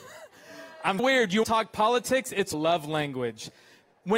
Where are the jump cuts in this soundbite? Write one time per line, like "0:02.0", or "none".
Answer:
0:01.0
0:01.4
0:02.5